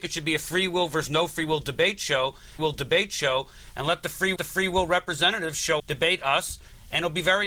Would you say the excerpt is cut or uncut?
cut